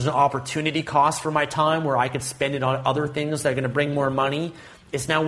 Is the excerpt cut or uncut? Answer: uncut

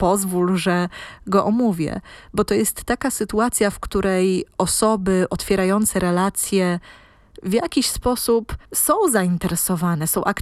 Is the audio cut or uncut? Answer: cut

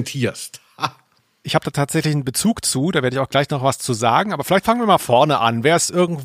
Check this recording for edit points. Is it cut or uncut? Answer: uncut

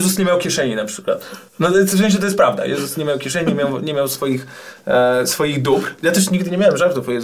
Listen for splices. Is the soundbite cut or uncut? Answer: cut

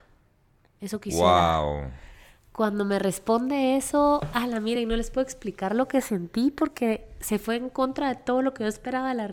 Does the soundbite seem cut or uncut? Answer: uncut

